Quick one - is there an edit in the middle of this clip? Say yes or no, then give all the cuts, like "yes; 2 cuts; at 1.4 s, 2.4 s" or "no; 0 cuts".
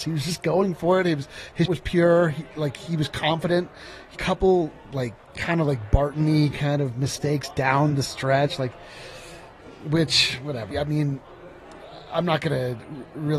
yes; 4 cuts; at 1.7 s, 4.2 s, 5.2 s, 10.7 s